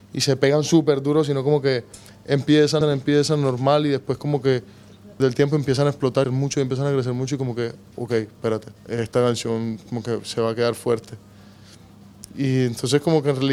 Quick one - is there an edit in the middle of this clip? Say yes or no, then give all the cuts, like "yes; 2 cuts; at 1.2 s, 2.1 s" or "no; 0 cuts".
yes; 4 cuts; at 2.8 s, 5.2 s, 6.2 s, 8.8 s